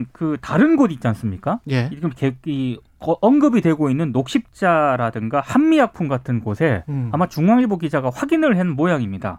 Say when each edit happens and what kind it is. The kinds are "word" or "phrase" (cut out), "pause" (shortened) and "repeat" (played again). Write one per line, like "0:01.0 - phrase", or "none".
none